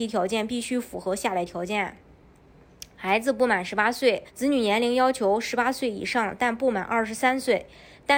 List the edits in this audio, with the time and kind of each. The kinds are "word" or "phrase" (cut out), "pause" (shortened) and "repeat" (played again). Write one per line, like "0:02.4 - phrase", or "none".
0:04.3 - pause